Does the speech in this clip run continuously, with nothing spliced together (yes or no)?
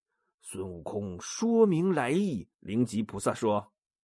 no